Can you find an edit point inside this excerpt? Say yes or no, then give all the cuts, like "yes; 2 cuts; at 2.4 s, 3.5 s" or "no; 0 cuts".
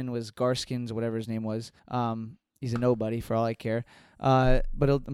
yes; 1 cut; at 1.8 s